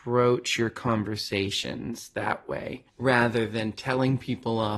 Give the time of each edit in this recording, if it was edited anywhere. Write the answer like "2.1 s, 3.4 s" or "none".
2.9 s